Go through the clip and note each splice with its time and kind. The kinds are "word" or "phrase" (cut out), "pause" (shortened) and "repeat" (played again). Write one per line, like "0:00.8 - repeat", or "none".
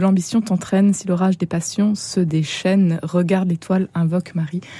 none